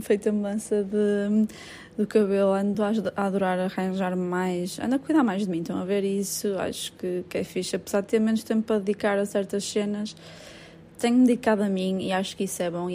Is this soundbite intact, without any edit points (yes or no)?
yes